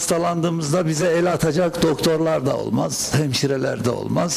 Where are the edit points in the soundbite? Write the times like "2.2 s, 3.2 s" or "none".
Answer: none